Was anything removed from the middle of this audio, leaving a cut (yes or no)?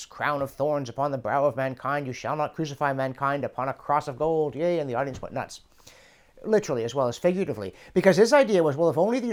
no